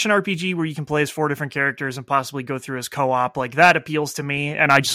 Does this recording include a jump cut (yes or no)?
no